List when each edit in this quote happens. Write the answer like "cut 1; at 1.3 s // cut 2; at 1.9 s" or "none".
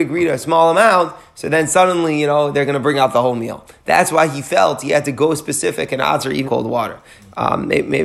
cut 1; at 6.4 s